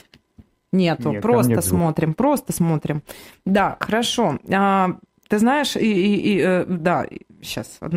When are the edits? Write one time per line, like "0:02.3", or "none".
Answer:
none